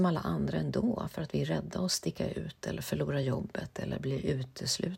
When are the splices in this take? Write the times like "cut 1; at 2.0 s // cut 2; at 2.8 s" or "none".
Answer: none